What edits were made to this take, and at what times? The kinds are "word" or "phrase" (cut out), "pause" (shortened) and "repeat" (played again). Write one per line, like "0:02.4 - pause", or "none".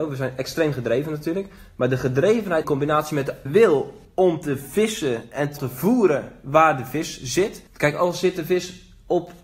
0:02.6 - word
0:03.5 - word
0:05.6 - word
0:07.7 - pause